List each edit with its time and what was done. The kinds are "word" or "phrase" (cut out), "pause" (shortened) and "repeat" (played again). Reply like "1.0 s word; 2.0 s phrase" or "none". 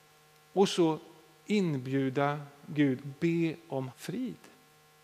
3.0 s word; 3.9 s word